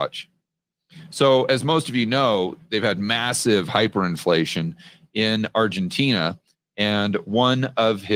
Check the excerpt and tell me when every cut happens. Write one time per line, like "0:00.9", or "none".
none